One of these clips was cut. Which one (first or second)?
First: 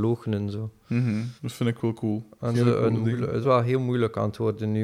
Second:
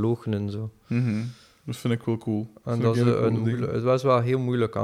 first